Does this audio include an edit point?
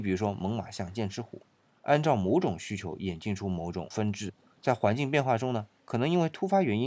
no; 0 cuts

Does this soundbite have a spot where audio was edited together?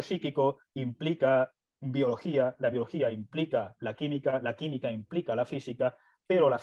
no; 0 cuts

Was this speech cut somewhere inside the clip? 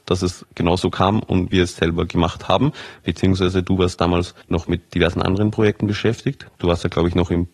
yes; 1 cut; at 4.4 s

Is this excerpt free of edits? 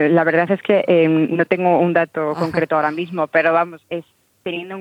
no; 1 cut; at 3.8 s

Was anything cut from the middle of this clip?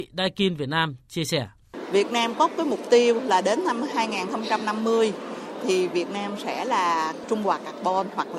no; 0 cuts

